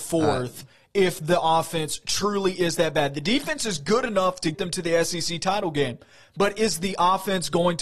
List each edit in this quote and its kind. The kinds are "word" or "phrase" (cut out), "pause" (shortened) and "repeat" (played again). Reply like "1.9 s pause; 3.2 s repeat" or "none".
4.5 s word